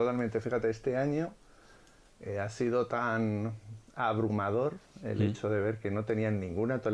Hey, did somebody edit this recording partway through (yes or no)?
no